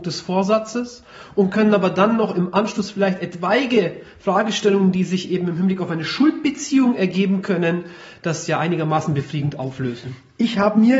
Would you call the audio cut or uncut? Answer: uncut